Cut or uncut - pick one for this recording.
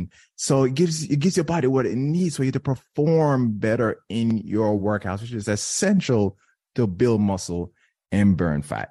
uncut